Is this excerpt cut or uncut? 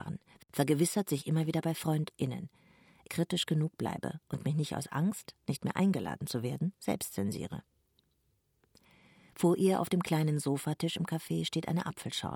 cut